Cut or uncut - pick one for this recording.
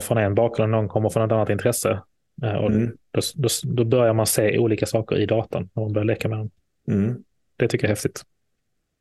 uncut